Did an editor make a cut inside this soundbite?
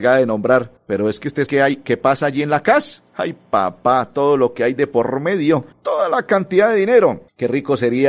yes; 1 cut; at 1.5 s

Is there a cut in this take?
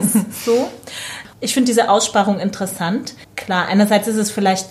yes; 1 cut; at 3.2 s

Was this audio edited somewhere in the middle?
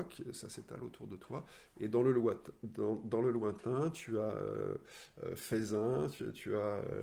no; 0 cuts

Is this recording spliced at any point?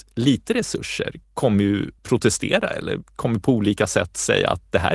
yes; 2 cuts; at 1.2 s, 2.0 s

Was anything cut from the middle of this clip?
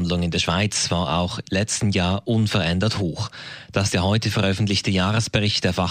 yes; 2 cuts; at 1.4 s, 3.9 s

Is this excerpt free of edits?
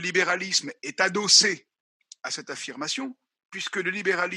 yes; 0 cuts

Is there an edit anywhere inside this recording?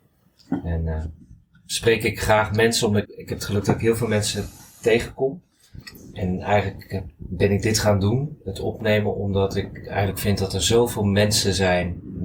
yes; 1 cut; at 3.0 s

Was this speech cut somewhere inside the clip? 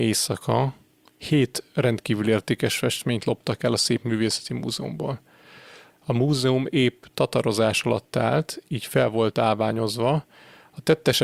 no; 0 cuts

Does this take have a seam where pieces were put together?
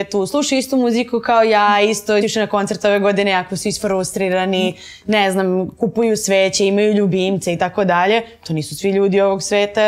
yes; 1 cut; at 2.2 s

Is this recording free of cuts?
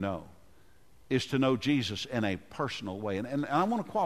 yes; 0 cuts

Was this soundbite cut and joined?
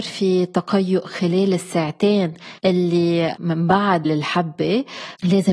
yes; 2 cuts; at 2.6 s, 4.0 s

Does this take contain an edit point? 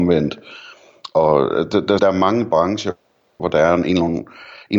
yes; 2 cuts; at 2.0 s, 3.4 s

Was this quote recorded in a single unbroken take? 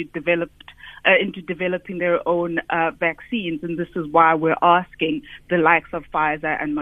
yes; 0 cuts

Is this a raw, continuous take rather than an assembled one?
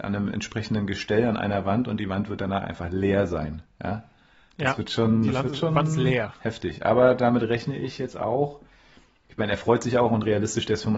yes; 0 cuts

